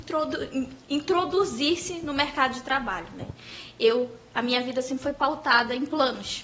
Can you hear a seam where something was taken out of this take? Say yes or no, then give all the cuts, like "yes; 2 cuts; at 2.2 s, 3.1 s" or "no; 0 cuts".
no; 0 cuts